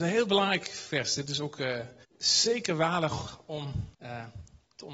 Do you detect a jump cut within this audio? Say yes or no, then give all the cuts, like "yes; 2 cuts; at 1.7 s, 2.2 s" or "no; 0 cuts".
yes; 2 cuts; at 2.0 s, 3.9 s